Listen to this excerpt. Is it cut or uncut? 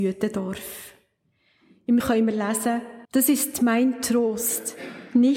cut